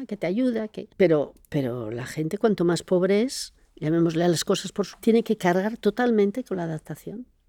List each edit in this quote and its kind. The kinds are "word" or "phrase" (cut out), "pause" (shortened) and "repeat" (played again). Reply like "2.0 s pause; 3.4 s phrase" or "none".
0.9 s pause; 4.9 s word

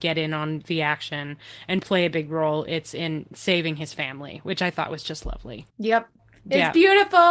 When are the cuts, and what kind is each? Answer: 5.7 s pause

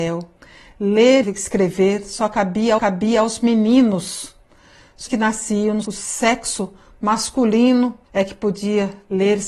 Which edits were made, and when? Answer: 1.2 s word; 2.8 s repeat; 5.1 s word; 5.8 s word; 8.0 s pause

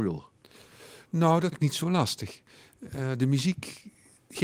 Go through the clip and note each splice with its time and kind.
1.5 s word

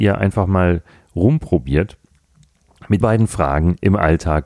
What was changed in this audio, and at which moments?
3.0 s word

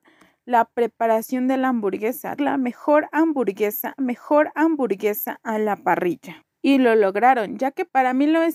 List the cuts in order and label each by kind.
2.4 s word; 4.0 s repeat; 6.5 s pause

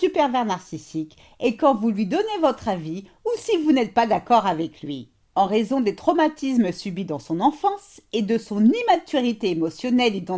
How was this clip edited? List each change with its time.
none

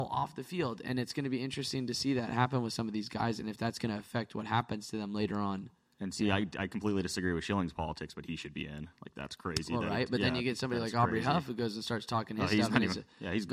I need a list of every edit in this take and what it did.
none

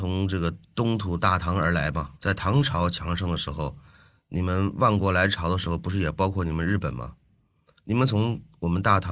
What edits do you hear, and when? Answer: 2.2 s pause

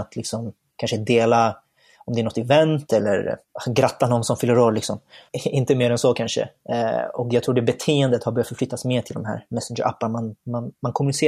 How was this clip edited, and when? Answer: 3.4 s pause

